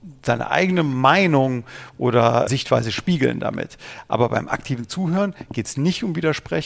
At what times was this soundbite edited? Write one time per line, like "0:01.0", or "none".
0:02.5